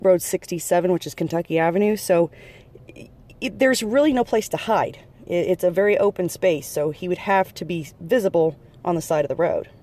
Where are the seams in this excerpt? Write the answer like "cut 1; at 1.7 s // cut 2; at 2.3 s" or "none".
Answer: none